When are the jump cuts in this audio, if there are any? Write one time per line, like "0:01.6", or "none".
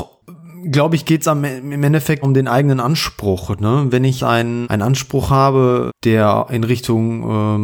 0:02.2
0:04.2
0:04.6
0:05.9